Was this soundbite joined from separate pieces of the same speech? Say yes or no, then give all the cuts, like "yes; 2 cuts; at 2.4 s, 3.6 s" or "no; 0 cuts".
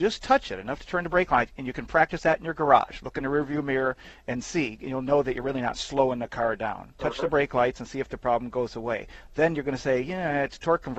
no; 0 cuts